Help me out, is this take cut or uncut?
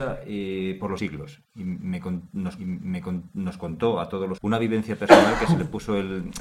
cut